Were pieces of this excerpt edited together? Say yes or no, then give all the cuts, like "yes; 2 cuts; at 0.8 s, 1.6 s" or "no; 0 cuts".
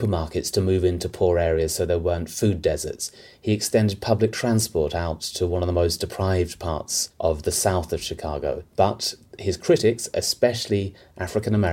no; 0 cuts